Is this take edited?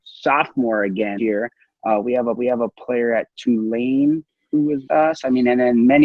yes; 4 cuts; at 1.2 s, 2.4 s, 4.3 s, 4.9 s

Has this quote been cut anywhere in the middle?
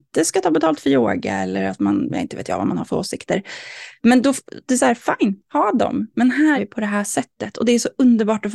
yes; 1 cut; at 6.6 s

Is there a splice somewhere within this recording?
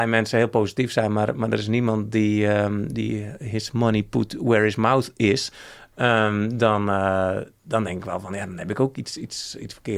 no; 0 cuts

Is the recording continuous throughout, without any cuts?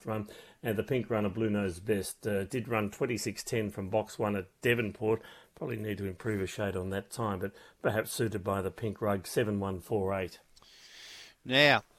yes; 0 cuts

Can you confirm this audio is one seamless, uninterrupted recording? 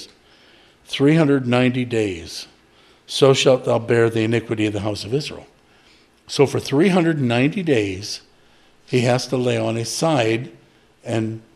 yes; 0 cuts

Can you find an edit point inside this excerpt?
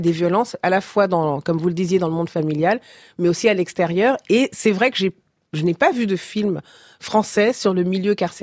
no; 0 cuts

